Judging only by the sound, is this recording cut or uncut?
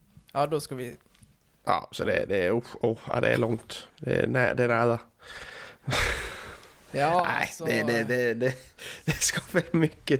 cut